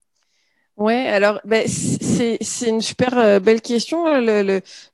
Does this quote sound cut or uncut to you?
uncut